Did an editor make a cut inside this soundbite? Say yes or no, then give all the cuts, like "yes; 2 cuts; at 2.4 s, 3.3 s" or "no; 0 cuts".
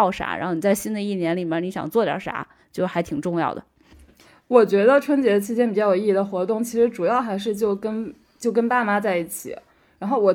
no; 0 cuts